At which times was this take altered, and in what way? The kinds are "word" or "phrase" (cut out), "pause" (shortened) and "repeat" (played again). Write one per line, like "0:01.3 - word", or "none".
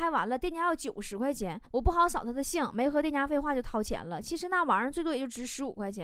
0:01.6 - pause